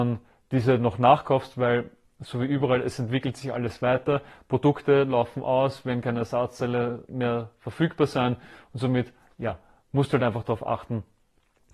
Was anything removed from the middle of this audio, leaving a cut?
no; 0 cuts

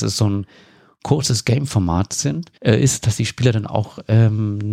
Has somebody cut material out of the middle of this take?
yes; 1 cut; at 2.6 s

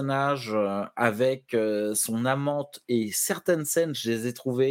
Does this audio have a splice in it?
no; 0 cuts

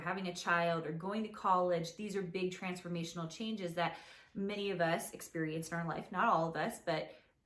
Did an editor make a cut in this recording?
no; 0 cuts

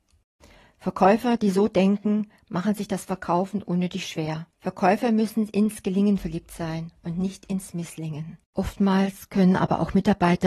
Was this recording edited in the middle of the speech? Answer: yes; 2 cuts; at 4.5 s, 8.4 s

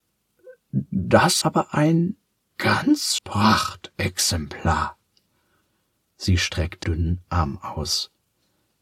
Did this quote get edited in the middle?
yes; 4 cuts; at 1.4 s, 2.5 s, 3.2 s, 6.8 s

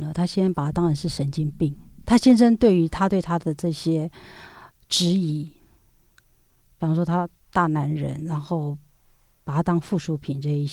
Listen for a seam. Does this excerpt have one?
no; 0 cuts

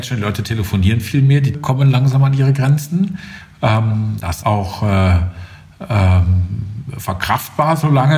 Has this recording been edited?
yes; 2 cuts; at 1.5 s, 4.4 s

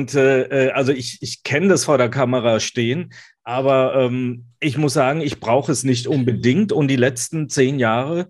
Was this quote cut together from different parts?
no; 0 cuts

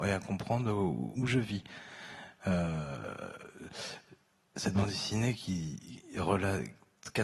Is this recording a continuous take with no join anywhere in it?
no; 1 cut; at 1.2 s

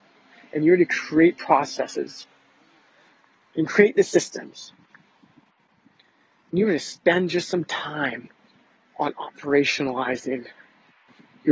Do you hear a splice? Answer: no; 0 cuts

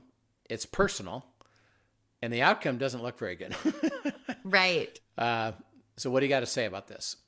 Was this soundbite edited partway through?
no; 0 cuts

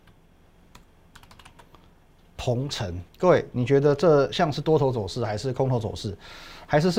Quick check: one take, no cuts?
no; 1 cut; at 3.1 s

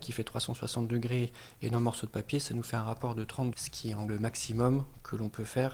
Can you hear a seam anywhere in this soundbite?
yes; 2 cuts; at 3.5 s, 4.1 s

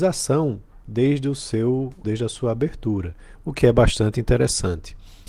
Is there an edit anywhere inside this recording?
yes; 1 cut; at 2.0 s

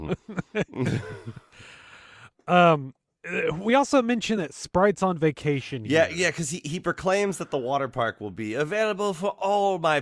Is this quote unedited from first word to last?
yes; 0 cuts

